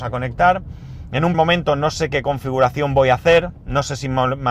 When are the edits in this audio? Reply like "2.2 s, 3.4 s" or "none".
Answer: 1.3 s